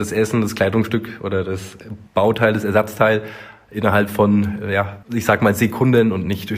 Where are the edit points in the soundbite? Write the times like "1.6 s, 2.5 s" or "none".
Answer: 2.1 s, 5.0 s